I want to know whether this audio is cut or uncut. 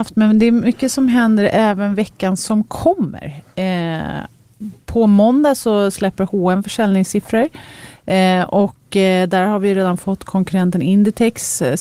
uncut